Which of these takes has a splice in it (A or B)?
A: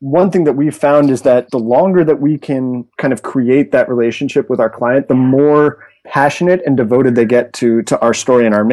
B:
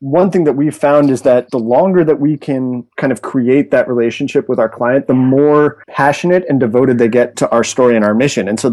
B